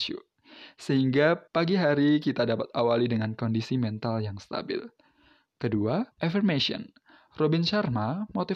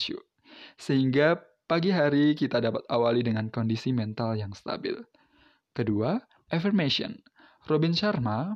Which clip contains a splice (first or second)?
first